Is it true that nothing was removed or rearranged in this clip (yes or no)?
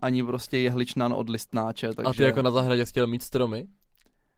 yes